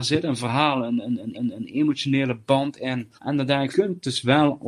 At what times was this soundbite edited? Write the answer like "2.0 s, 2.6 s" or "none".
1.3 s, 3.2 s, 3.7 s